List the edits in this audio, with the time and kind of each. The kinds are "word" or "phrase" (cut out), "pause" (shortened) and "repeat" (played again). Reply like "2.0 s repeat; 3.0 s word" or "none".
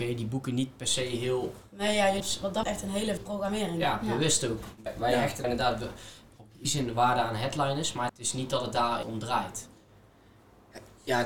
2.2 s word; 2.6 s word; 3.2 s word; 4.9 s word; 5.4 s word; 6.7 s word; 8.1 s word; 9.0 s word

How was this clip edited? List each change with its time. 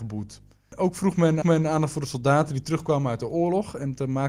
1.4 s repeat

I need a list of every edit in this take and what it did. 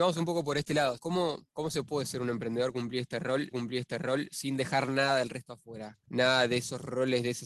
1.0 s word; 1.5 s pause; 3.5 s repeat

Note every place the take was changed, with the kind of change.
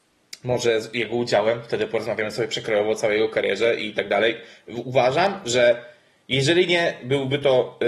none

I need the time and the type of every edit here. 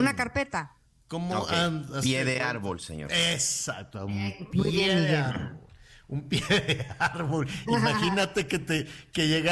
none

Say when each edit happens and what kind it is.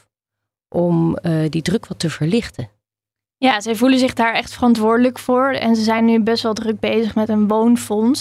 none

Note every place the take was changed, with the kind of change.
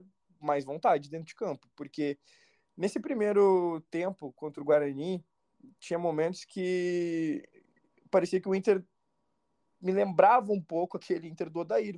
none

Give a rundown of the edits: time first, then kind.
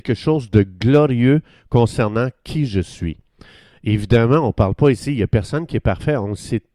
none

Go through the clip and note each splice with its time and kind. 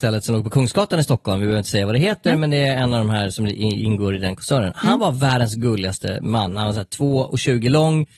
none

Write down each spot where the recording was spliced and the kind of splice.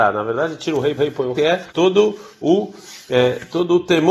1.0 s repeat; 1.3 s word; 1.7 s pause

